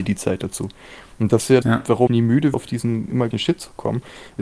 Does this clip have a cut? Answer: yes; 4 cuts; at 1.6 s, 2.1 s, 2.5 s, 3.3 s

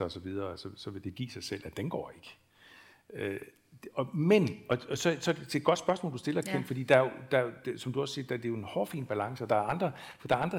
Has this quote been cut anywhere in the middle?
no; 0 cuts

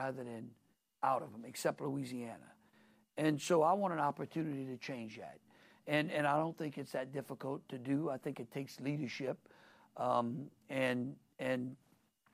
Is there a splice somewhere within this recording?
no; 0 cuts

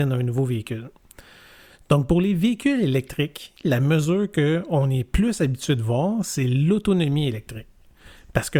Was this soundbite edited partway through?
no; 0 cuts

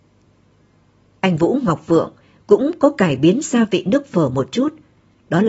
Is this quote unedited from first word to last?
yes; 0 cuts

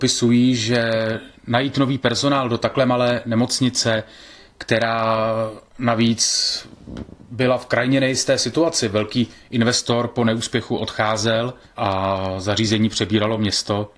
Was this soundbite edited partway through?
yes; 2 cuts; at 5.7 s, 11.6 s

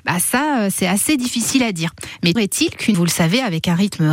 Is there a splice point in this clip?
yes; 2 cuts; at 2.4 s, 2.9 s

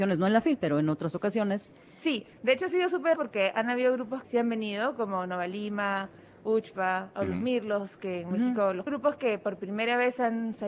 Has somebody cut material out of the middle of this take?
yes; 3 cuts; at 3.2 s, 4.2 s, 8.9 s

